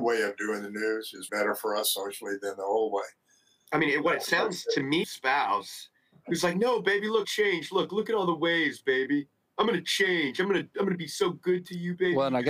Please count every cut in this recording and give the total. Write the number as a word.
three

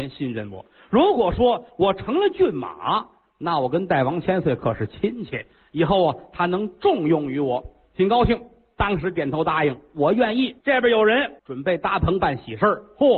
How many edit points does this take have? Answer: two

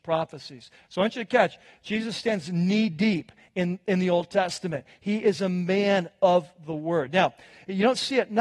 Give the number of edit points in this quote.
zero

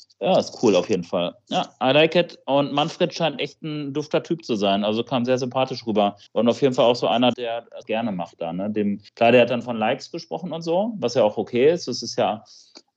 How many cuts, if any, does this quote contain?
four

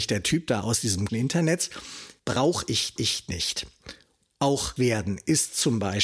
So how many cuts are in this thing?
four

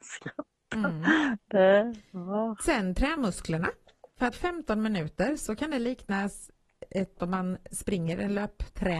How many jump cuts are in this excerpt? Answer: three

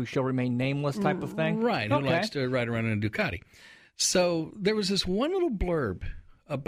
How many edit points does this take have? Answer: zero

